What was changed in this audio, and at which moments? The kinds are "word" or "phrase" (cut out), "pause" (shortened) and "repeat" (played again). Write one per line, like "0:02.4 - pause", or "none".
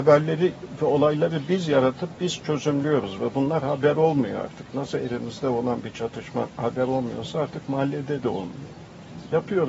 none